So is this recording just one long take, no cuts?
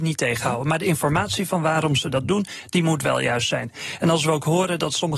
yes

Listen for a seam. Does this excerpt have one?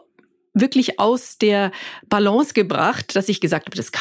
no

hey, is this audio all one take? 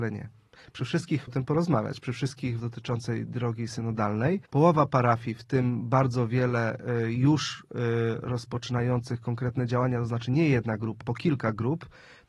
no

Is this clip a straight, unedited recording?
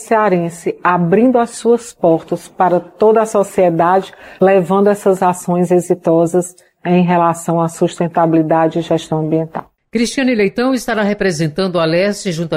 yes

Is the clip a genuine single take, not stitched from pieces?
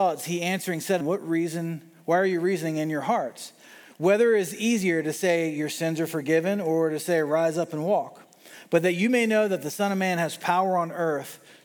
no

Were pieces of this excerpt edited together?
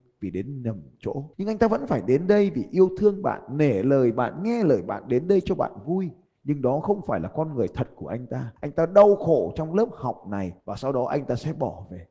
yes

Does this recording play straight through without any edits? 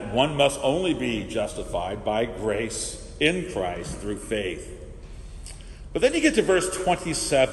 yes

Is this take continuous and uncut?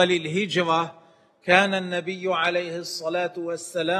yes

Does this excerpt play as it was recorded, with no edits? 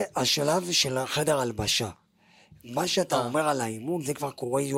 yes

